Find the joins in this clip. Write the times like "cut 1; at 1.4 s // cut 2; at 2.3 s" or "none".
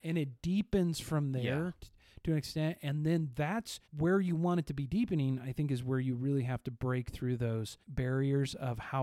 cut 1; at 3.8 s // cut 2; at 7.8 s